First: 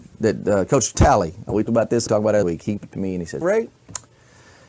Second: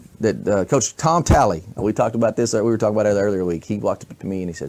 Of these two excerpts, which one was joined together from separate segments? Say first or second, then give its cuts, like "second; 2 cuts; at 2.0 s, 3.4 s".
first; 6 cuts; at 0.9 s, 1.7 s, 2.1 s, 2.4 s, 2.8 s, 3.4 s